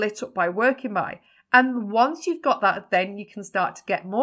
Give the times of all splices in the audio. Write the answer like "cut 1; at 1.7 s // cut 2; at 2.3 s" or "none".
none